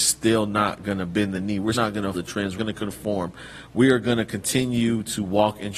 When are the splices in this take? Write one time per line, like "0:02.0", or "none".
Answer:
0:01.7
0:02.1
0:02.6